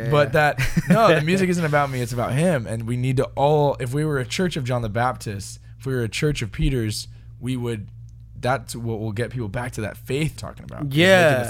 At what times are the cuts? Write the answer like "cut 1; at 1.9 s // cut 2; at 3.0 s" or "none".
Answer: cut 1; at 10.4 s